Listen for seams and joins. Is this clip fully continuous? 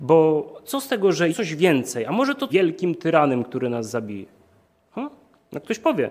no; 2 cuts; at 1.3 s, 2.5 s

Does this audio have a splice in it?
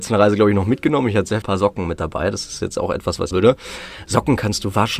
yes; 2 cuts; at 1.4 s, 3.3 s

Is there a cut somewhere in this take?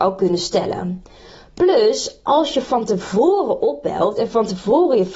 no; 0 cuts

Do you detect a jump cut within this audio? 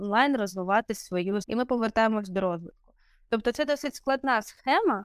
yes; 2 cuts; at 1.4 s, 3.7 s

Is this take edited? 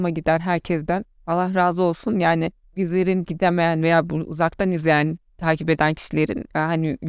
no; 0 cuts

